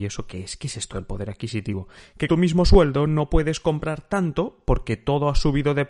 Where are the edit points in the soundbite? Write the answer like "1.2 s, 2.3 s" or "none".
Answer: 2.3 s